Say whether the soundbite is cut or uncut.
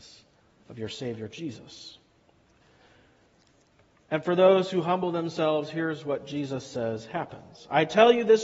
uncut